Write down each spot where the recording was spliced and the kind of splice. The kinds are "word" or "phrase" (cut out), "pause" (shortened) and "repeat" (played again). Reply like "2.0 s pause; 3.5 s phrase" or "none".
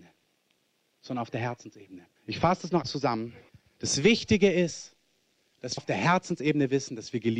2.2 s pause; 2.8 s word; 3.5 s pause; 5.8 s word